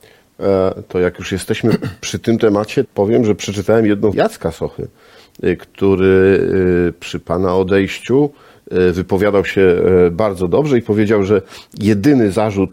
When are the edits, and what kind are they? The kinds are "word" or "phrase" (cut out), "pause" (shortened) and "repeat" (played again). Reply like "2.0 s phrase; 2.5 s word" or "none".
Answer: 2.9 s word; 4.1 s word